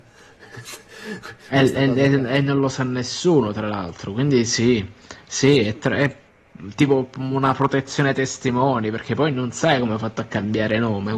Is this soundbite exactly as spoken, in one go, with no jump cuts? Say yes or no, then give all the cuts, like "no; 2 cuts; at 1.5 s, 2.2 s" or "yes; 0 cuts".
yes; 0 cuts